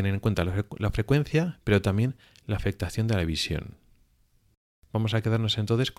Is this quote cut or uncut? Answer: uncut